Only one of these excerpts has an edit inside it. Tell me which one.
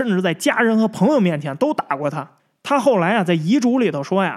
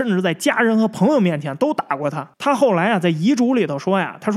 second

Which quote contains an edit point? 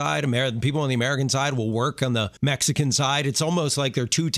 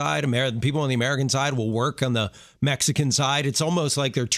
first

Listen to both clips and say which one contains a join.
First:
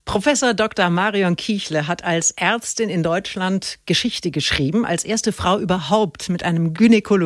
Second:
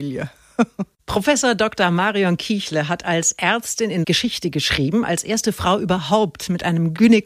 second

